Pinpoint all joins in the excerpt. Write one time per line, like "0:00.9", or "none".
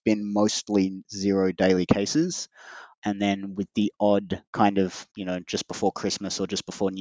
0:04.5
0:05.1